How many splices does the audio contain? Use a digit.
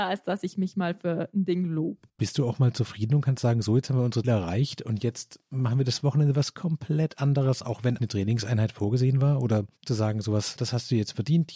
5